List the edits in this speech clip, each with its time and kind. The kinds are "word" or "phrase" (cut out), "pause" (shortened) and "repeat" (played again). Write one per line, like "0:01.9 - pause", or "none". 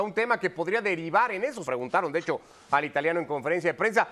0:01.6 - word